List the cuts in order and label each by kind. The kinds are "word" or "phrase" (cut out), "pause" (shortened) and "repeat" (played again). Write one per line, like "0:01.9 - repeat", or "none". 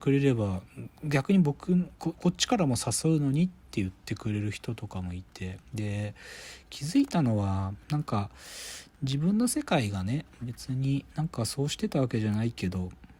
0:05.6 - pause